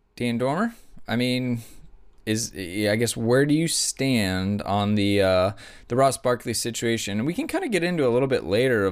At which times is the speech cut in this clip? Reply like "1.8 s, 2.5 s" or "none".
none